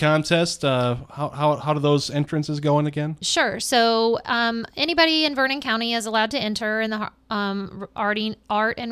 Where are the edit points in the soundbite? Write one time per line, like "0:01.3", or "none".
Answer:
none